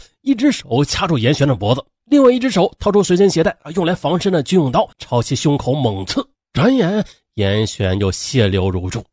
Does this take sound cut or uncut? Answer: cut